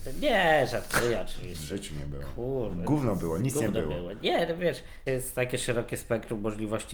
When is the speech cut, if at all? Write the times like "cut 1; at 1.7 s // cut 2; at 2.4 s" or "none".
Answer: cut 1; at 5.1 s